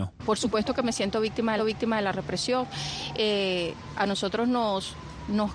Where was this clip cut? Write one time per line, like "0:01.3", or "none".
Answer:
0:01.6